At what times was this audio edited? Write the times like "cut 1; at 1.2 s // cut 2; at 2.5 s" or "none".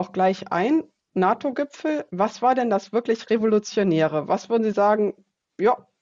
cut 1; at 2.1 s